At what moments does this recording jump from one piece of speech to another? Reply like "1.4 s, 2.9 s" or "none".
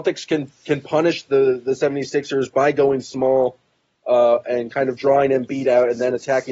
none

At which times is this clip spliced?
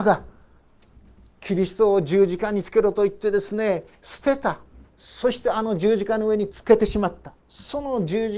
4.9 s, 7.4 s

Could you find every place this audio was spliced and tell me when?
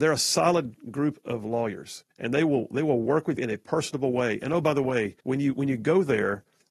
2.1 s, 3.4 s, 5.2 s

